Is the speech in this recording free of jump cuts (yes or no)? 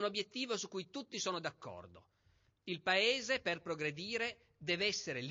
yes